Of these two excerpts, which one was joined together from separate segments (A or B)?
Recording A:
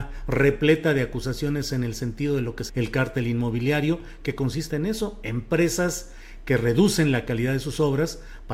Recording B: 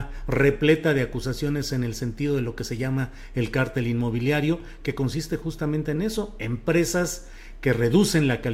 A